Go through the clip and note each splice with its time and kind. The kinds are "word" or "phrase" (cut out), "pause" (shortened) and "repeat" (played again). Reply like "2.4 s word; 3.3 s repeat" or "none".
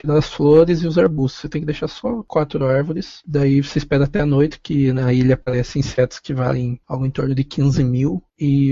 6.8 s pause